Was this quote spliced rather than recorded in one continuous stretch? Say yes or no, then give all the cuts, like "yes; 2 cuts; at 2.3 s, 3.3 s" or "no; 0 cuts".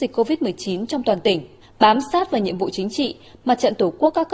yes; 1 cut; at 1.6 s